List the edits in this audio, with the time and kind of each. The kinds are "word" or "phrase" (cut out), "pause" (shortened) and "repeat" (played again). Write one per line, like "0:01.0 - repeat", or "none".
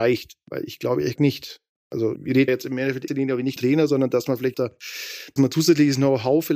0:01.2 - word
0:02.2 - word
0:02.5 - word
0:03.1 - word
0:03.6 - word
0:04.5 - word
0:05.4 - word